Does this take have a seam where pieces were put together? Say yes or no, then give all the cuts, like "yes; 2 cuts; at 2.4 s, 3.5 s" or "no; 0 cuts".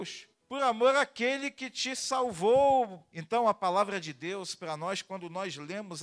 no; 0 cuts